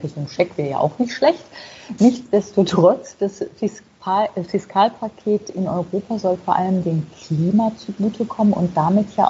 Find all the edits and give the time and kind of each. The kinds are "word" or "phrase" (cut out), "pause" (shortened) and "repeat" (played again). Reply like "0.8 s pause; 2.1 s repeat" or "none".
none